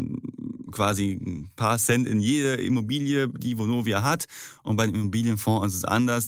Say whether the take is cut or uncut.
uncut